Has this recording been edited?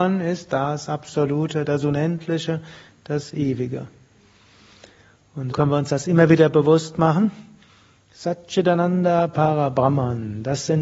yes; 1 cut; at 5.5 s

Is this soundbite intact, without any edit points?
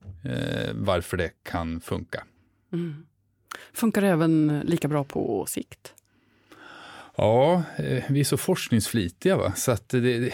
no; 2 cuts; at 1.4 s, 2.4 s

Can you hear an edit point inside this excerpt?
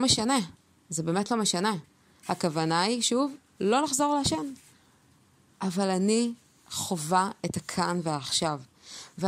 no; 0 cuts

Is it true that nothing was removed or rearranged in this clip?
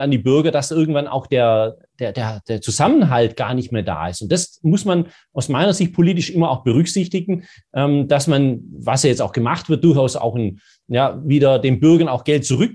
yes; 0 cuts

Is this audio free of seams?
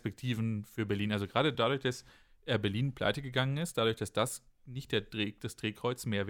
yes; 0 cuts

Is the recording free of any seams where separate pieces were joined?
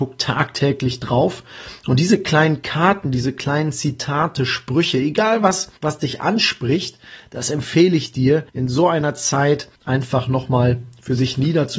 no; 3 cuts; at 5.8 s, 8.5 s, 9.8 s

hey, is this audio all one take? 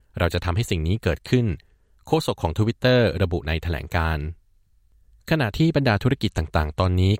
yes; 0 cuts

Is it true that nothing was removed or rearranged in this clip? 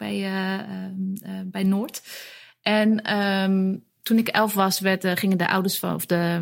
yes; 0 cuts

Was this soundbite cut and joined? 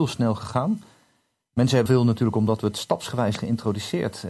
yes; 2 cuts; at 1.9 s, 3.4 s

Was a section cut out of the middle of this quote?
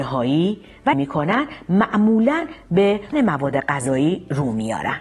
yes; 2 cuts; at 0.9 s, 3.1 s

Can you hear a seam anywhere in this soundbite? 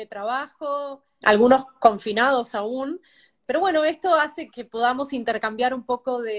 yes; 3 cuts; at 1.2 s, 3.5 s, 4.5 s

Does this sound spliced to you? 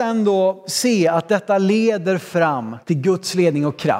yes; 1 cut; at 2.8 s

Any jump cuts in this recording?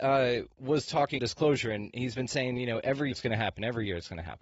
yes; 2 cuts; at 1.2 s, 3.1 s

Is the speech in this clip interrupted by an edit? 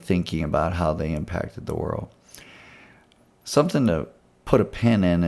no; 0 cuts

